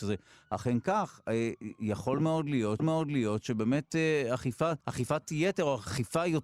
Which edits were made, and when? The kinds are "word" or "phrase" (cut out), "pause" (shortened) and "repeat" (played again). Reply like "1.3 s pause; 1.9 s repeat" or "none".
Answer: 2.8 s repeat; 4.8 s pause